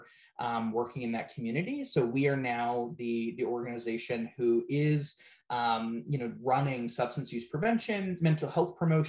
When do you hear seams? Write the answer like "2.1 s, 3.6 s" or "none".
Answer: none